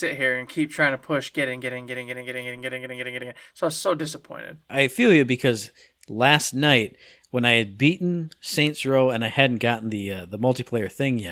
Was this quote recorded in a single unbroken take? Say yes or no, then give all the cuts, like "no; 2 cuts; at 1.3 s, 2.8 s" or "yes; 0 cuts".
yes; 0 cuts